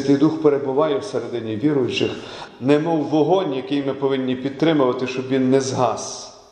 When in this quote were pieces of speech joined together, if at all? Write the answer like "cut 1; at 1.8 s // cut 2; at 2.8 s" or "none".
none